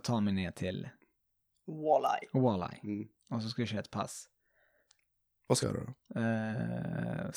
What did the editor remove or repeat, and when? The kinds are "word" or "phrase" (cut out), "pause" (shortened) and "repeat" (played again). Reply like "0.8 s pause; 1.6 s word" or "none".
5.6 s word

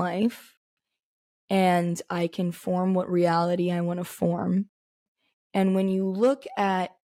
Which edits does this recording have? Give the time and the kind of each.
none

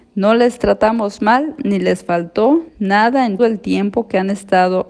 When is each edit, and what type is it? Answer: 2.7 s pause; 3.4 s word

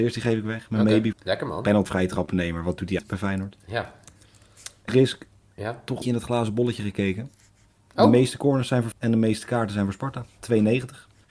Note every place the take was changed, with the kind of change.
1.1 s word; 1.9 s word; 3.0 s word; 4.9 s word; 6.0 s word; 8.9 s word

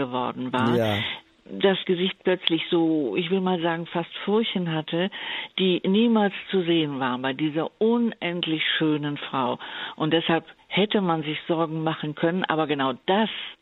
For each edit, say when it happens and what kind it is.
1.8 s word

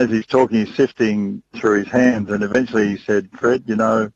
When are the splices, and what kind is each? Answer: 1.5 s word

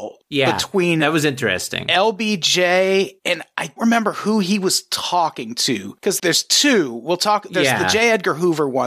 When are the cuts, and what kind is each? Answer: 3.2 s pause; 3.8 s word; 6.2 s word

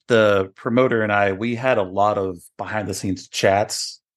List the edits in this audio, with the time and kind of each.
none

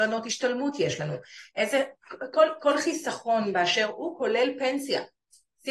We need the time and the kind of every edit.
none

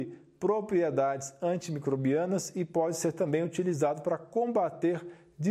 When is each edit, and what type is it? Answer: none

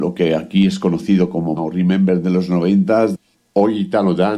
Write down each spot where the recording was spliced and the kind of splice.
1.6 s word

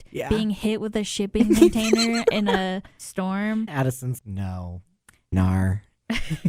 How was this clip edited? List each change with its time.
3.7 s word; 4.2 s word; 5.3 s word

